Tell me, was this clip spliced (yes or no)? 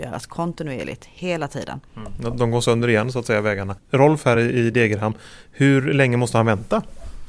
no